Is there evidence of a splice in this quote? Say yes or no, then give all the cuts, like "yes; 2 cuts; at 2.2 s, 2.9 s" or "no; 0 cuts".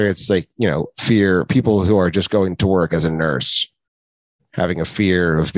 yes; 1 cut; at 2.9 s